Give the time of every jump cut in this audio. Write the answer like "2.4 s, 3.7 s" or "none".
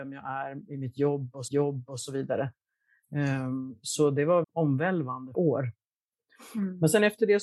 1.5 s, 4.4 s, 5.3 s